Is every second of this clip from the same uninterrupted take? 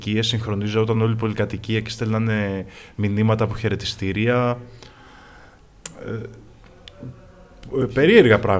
yes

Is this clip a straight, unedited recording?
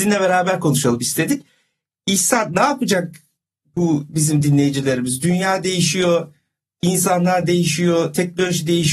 yes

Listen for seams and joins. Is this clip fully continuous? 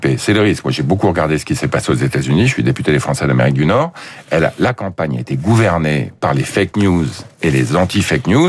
yes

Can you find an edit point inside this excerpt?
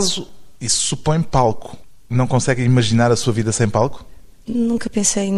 no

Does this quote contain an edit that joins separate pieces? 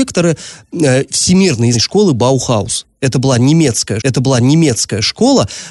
yes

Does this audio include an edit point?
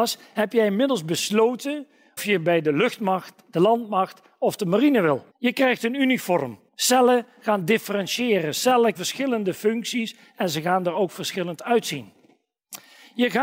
yes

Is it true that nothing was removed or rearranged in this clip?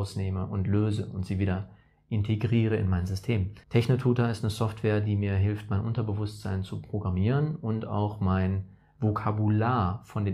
no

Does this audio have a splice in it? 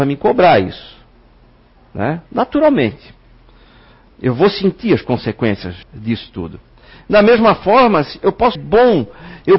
yes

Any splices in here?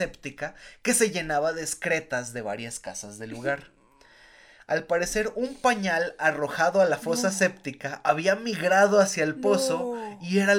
no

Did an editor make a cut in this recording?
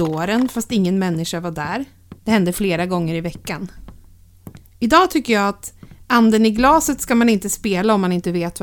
yes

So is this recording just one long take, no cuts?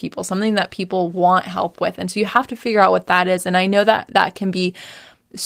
yes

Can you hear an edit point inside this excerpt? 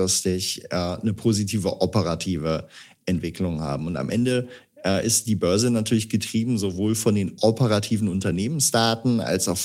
no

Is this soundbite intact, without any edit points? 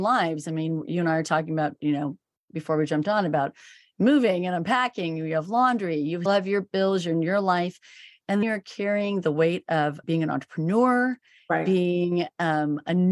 no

